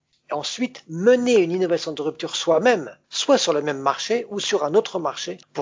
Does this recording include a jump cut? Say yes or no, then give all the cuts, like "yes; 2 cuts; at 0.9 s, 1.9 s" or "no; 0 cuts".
yes; 1 cut; at 3.0 s